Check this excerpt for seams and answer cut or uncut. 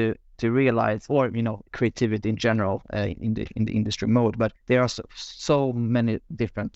cut